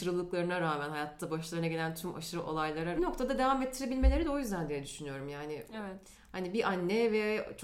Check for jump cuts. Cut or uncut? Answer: cut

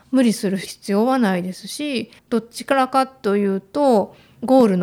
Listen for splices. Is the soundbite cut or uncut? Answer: cut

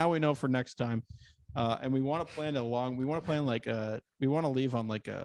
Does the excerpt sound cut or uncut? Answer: uncut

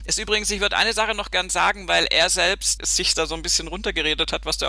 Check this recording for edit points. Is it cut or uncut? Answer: cut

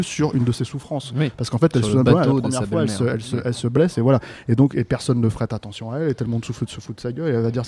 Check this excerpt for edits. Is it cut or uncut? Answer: uncut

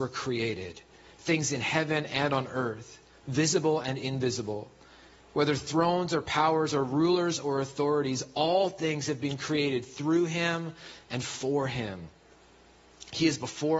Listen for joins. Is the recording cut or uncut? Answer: uncut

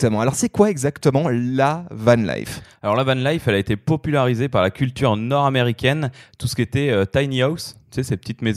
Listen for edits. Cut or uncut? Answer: uncut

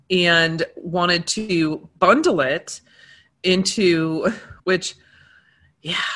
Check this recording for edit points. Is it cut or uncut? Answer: cut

